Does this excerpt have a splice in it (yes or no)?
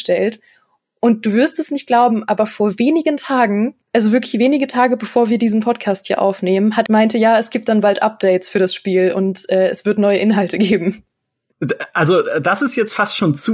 yes